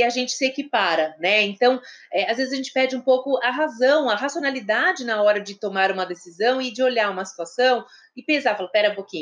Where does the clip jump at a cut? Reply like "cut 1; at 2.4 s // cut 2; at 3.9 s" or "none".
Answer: none